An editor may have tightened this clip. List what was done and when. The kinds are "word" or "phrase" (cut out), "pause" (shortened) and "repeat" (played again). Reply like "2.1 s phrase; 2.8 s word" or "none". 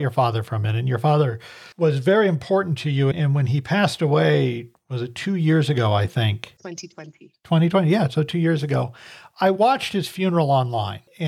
1.7 s pause; 3.1 s word